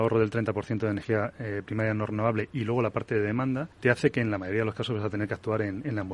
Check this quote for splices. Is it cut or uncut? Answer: cut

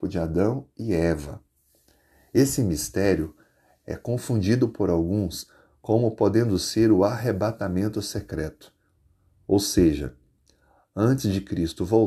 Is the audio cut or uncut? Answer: uncut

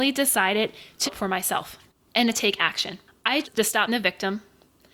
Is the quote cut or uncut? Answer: cut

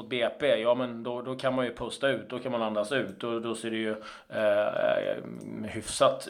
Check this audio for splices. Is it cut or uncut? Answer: uncut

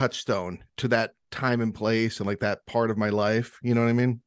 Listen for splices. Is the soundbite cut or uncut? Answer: uncut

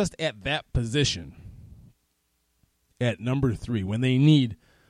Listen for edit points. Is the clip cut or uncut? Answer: uncut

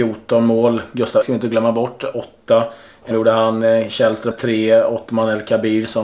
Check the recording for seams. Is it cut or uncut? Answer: cut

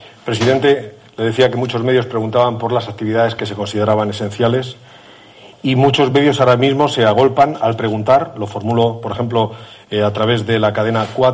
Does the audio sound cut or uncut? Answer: uncut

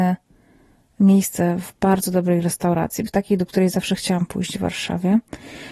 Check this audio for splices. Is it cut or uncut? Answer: cut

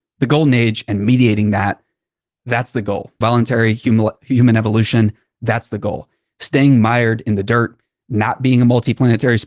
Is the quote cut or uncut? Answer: cut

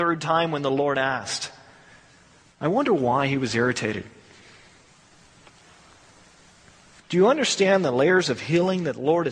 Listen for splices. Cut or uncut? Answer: uncut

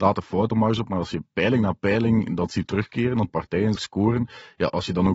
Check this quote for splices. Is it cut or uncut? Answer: cut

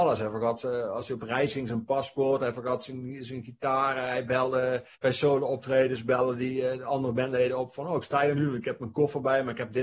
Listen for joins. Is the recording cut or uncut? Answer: cut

